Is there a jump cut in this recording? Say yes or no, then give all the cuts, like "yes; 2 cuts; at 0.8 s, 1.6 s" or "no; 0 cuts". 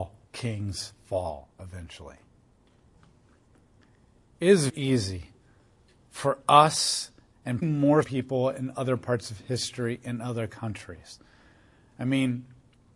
yes; 3 cuts; at 4.7 s, 7.6 s, 8.0 s